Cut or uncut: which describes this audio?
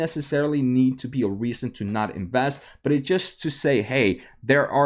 uncut